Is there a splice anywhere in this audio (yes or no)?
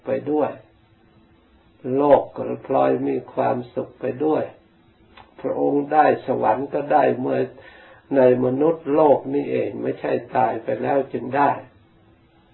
no